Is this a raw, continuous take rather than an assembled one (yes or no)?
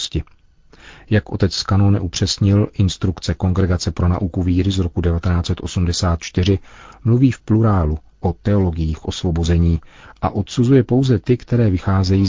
yes